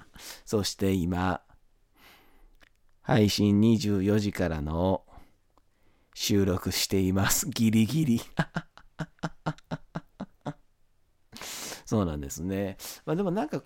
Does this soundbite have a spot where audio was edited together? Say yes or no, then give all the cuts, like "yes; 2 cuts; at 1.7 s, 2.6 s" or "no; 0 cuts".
no; 0 cuts